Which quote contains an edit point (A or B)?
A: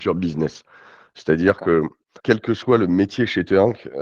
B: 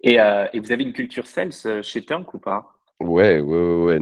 A